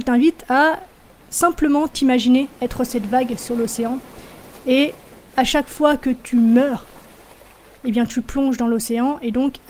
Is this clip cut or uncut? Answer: uncut